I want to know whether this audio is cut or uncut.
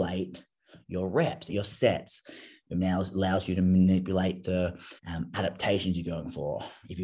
cut